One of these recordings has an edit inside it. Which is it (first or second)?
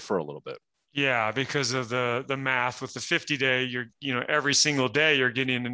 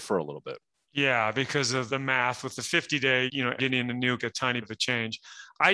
second